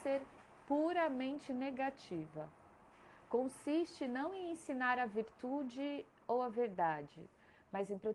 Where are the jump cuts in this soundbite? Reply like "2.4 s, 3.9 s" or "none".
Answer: none